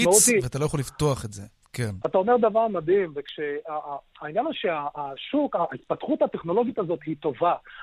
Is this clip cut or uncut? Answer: uncut